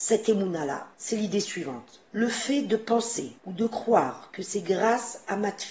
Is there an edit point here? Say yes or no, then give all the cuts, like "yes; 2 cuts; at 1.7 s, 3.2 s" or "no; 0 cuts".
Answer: yes; 3 cuts; at 0.9 s, 2.1 s, 3.4 s